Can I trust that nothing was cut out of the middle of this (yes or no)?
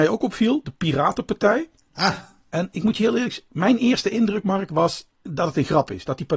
no